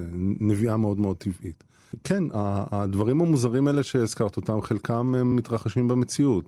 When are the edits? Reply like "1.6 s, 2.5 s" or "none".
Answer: none